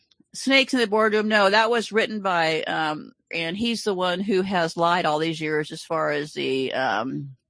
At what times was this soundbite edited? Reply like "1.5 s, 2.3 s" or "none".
3.3 s